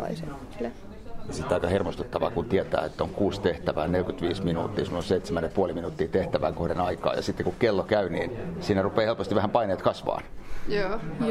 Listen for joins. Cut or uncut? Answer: uncut